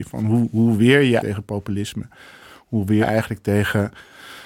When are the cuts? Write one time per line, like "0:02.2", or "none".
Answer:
0:01.2
0:03.0